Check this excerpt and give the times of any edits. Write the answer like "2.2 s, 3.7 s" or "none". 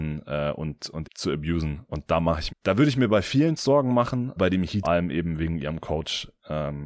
1.0 s, 2.5 s, 3.6 s, 4.4 s, 4.8 s